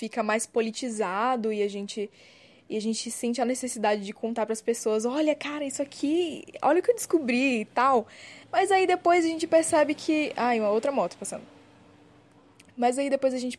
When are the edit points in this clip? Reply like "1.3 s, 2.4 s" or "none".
8.4 s